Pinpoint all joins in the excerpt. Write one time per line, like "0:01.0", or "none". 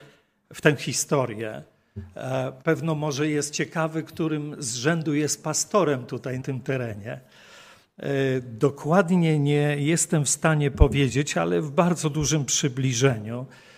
0:02.6
0:06.4